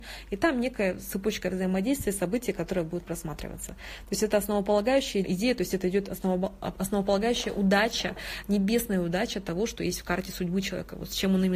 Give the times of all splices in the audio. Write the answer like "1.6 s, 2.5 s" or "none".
5.2 s

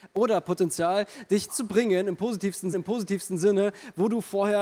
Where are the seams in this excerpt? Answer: 1.5 s, 2.7 s

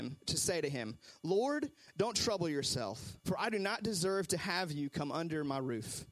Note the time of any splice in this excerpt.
3.2 s

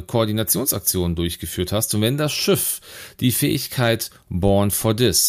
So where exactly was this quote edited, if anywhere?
none

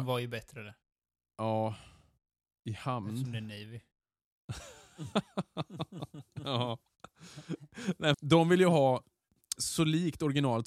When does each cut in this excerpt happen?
8.1 s, 9.6 s

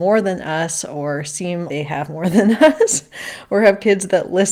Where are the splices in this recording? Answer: 1.7 s

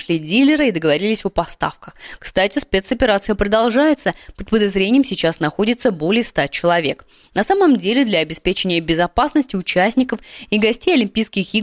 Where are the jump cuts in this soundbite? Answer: none

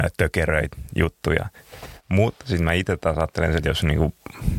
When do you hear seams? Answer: 3.6 s

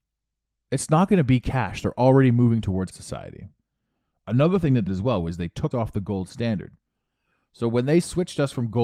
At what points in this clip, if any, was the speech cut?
2.9 s, 4.9 s, 5.7 s

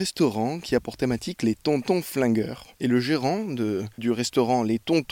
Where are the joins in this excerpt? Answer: 2.7 s, 3.9 s

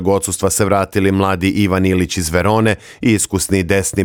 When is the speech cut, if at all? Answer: none

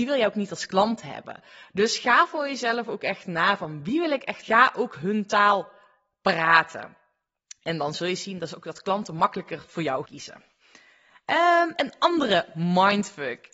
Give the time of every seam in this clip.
4.4 s, 10.0 s

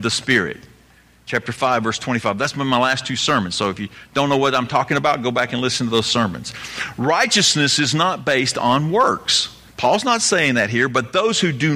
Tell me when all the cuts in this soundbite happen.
9.7 s

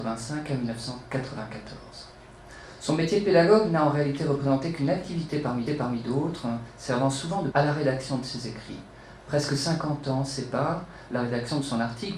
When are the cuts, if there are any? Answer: 5.7 s, 7.5 s

